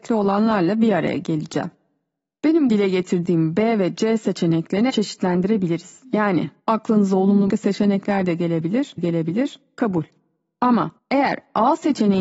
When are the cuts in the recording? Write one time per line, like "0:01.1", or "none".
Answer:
0:02.7
0:04.9
0:06.6
0:07.5
0:09.0
0:11.0

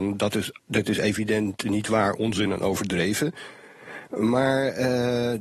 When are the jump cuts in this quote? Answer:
none

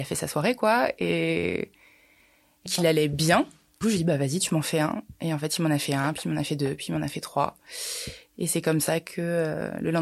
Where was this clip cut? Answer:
0:02.7
0:03.8

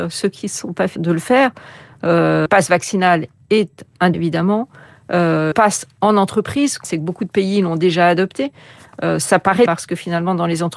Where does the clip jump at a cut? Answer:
0:01.0
0:02.5
0:04.1
0:05.5
0:06.8
0:09.7

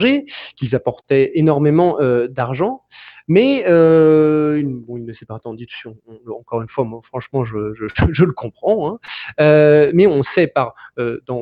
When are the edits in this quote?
none

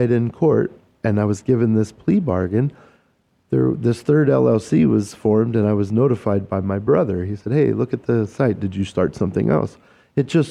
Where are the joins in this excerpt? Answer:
none

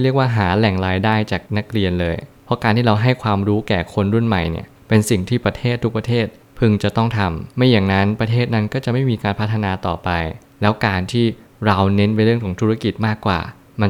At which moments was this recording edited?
0:01.5
0:07.5

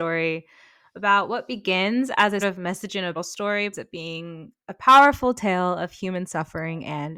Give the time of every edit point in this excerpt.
0:02.4
0:03.1
0:03.7

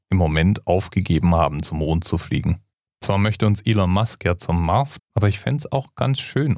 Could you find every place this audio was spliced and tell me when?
0:02.7
0:05.0

